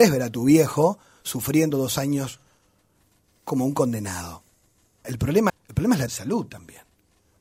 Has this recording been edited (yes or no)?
yes